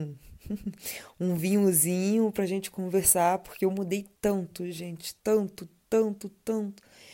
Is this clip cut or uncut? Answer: cut